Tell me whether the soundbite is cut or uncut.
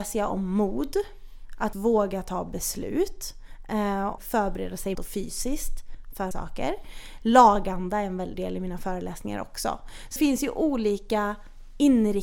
cut